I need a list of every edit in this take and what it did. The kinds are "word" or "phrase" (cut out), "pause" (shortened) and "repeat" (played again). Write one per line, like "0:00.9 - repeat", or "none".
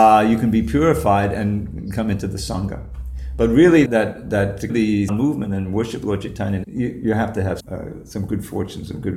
0:03.9 - word
0:04.7 - word
0:05.1 - word
0:06.6 - phrase
0:07.6 - word